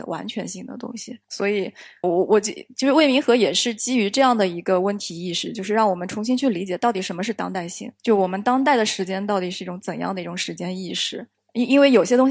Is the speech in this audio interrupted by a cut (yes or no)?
yes